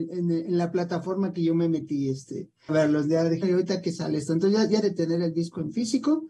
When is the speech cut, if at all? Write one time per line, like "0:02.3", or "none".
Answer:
0:02.7
0:03.4
0:04.8